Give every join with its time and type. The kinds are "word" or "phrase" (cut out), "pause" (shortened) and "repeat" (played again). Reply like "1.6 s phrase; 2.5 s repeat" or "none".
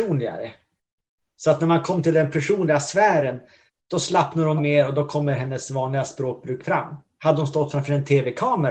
3.7 s pause; 4.6 s word